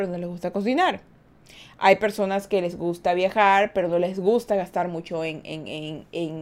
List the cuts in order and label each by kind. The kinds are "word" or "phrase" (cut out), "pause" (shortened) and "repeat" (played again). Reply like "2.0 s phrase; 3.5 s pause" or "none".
none